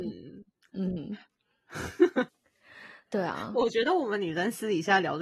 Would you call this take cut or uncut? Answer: cut